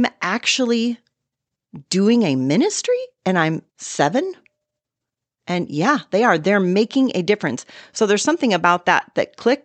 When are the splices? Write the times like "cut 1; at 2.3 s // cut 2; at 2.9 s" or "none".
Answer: cut 1; at 3.7 s